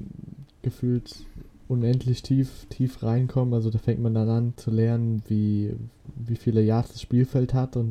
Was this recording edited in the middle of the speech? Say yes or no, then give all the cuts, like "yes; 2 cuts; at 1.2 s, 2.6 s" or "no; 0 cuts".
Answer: no; 0 cuts